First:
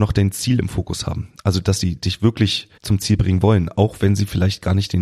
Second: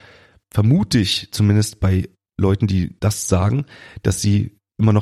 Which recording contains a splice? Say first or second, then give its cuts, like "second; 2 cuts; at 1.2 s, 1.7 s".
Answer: first; 1 cut; at 2.8 s